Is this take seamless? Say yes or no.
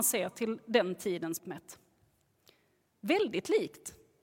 no